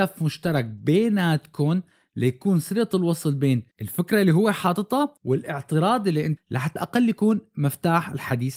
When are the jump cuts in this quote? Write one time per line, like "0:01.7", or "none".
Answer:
0:03.7
0:05.2
0:06.4
0:06.8